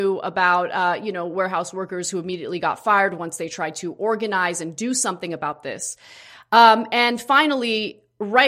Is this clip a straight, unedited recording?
yes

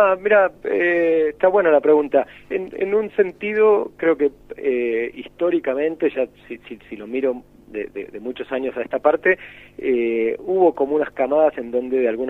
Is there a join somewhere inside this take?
no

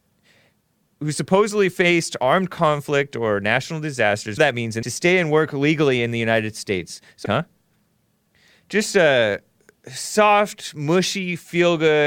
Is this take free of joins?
no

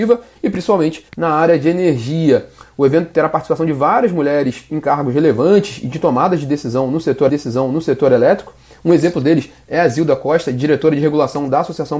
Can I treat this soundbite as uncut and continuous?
no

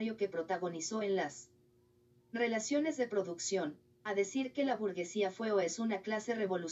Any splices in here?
no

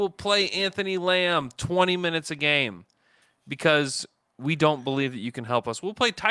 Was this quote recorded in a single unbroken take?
yes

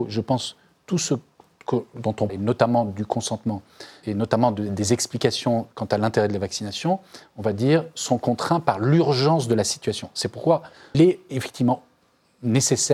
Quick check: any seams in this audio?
yes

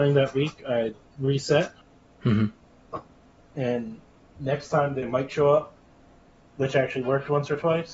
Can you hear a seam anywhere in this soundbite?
no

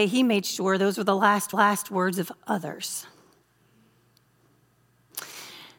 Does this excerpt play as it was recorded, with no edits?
no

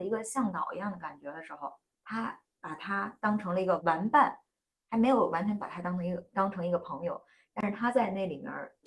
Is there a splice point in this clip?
yes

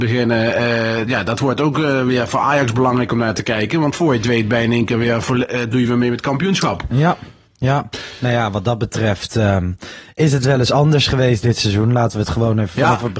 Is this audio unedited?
yes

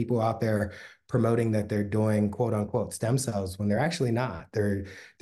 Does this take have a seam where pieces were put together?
no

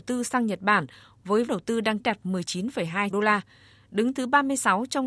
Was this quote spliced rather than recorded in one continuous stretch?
yes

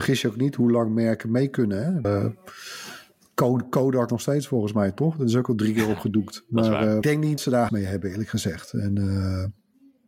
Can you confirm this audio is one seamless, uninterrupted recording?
no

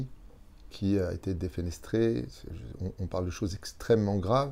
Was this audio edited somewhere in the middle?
no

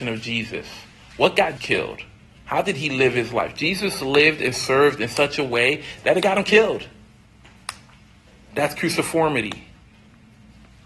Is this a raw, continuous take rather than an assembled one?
no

